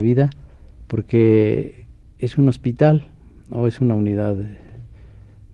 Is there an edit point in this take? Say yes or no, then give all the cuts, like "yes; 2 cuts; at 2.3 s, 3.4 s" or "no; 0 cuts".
no; 0 cuts